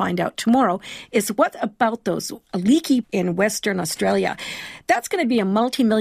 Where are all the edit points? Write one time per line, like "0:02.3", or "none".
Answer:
0:03.0